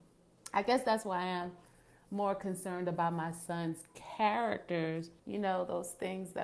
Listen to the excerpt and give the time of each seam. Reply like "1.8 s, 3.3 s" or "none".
5.2 s